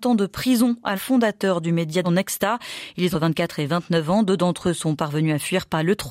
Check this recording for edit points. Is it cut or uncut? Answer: cut